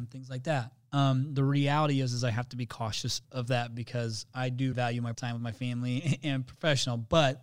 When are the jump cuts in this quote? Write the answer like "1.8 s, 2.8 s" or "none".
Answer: 3.2 s, 4.7 s, 5.1 s